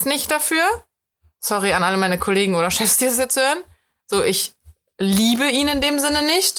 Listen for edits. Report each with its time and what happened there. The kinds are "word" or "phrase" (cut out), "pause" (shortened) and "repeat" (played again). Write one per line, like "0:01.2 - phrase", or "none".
none